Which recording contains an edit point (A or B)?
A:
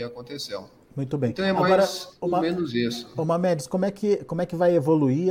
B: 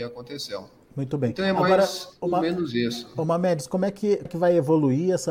B